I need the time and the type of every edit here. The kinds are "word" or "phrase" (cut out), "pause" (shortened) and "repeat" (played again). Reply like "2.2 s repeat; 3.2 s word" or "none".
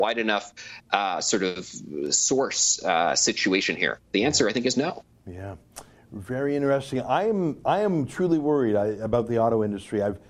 none